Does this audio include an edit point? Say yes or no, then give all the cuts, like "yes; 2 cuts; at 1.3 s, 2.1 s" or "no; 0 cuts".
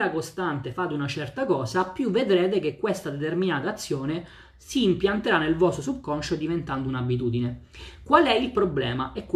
no; 0 cuts